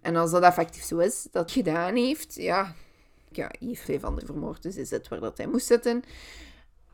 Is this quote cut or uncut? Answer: cut